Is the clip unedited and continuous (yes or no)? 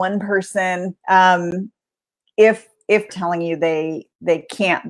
no